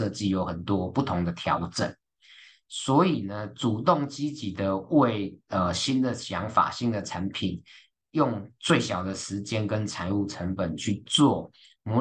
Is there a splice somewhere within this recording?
no; 0 cuts

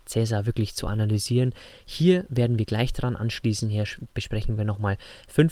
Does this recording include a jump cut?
no; 0 cuts

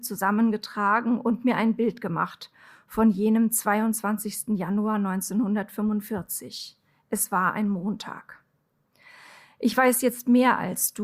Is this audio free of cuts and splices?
yes; 0 cuts

